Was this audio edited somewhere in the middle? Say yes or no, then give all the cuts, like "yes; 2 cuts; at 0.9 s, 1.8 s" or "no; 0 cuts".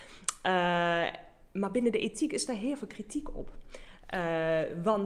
no; 0 cuts